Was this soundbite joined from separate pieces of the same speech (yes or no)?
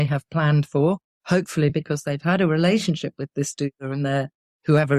no